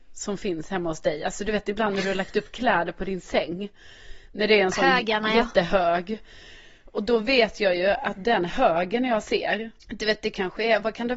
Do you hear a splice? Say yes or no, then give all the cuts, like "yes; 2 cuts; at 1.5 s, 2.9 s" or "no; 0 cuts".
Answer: no; 0 cuts